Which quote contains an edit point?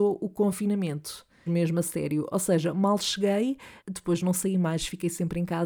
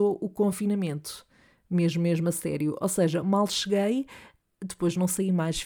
first; 2 cuts; at 1.5 s, 3.8 s

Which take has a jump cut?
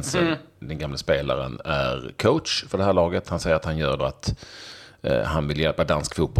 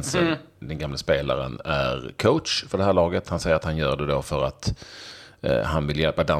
first; 1 cut; at 4.0 s

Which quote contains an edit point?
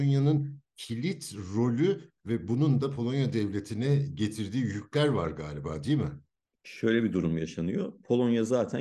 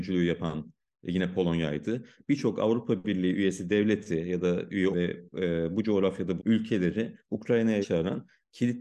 second; 3 cuts; at 4.9 s, 6.4 s, 7.8 s

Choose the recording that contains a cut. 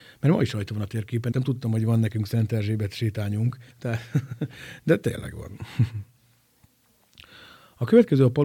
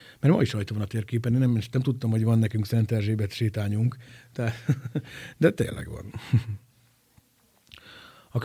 first; 2 cuts; at 1.3 s, 3.7 s

